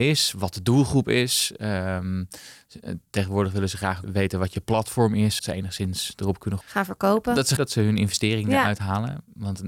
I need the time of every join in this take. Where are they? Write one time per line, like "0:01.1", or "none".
0:04.0
0:05.4
0:06.6
0:07.6